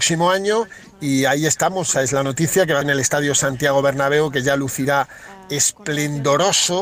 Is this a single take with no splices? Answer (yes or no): no